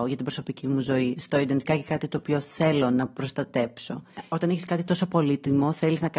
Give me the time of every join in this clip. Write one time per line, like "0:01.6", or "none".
0:01.7